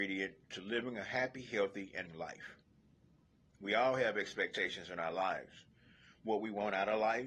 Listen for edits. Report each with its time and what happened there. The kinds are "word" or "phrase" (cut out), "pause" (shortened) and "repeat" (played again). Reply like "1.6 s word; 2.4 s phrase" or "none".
2.1 s word